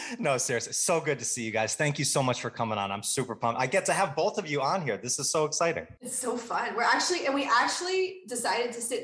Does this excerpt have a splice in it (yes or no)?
yes